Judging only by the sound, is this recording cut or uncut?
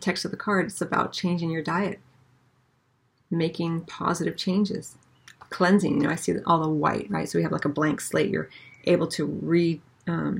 uncut